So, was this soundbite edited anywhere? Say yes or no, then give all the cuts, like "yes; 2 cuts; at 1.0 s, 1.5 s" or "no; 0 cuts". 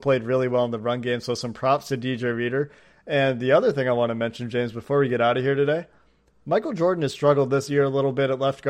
no; 0 cuts